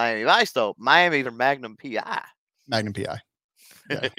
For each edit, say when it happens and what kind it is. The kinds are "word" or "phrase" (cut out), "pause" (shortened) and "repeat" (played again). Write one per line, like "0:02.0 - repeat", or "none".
0:01.2 - word